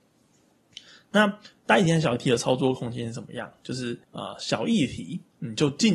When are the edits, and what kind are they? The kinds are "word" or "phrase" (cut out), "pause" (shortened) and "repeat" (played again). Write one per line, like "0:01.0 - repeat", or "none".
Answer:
0:04.0 - pause